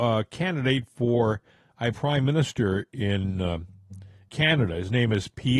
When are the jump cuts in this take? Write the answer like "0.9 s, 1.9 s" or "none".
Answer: 1.9 s, 4.3 s